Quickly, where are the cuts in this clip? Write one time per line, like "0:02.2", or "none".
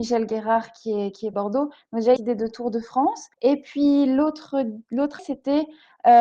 0:01.3
0:02.2
0:03.3
0:05.2